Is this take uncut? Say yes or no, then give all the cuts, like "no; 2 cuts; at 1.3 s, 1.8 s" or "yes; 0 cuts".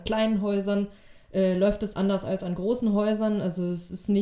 yes; 0 cuts